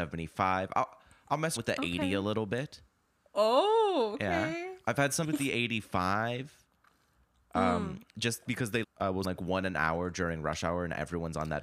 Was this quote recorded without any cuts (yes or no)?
no